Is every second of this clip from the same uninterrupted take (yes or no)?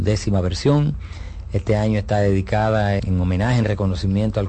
no